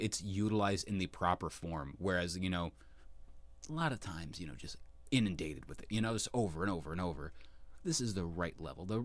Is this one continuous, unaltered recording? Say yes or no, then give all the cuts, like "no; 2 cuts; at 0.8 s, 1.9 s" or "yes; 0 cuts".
yes; 0 cuts